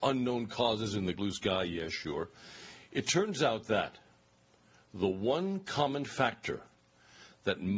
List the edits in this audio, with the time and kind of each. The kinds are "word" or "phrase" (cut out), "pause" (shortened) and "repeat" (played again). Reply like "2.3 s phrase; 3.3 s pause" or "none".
1.2 s word